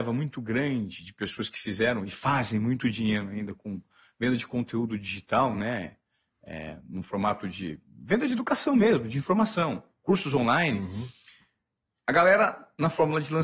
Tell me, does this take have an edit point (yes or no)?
no